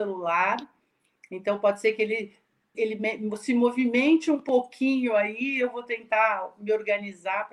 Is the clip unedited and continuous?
no; 1 cut; at 2.7 s

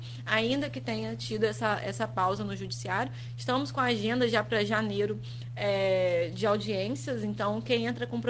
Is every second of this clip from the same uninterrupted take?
yes; 0 cuts

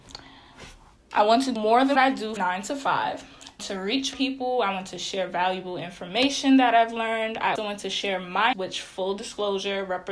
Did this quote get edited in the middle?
yes; 7 cuts; at 1.6 s, 2.0 s, 2.4 s, 3.6 s, 4.1 s, 7.6 s, 8.5 s

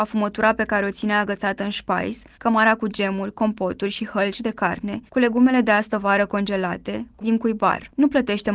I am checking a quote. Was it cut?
yes; 2 cuts; at 2.3 s, 7.2 s

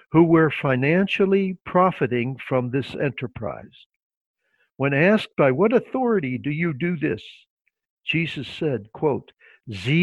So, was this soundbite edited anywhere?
no; 0 cuts

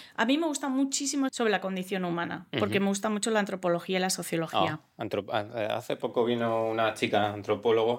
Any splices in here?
yes; 1 cut; at 1.3 s

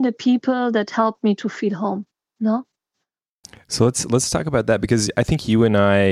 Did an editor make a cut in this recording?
no; 0 cuts

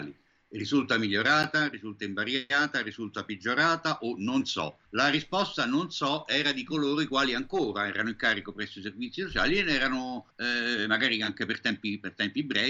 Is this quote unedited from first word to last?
no; 2 cuts; at 4.9 s, 10.3 s

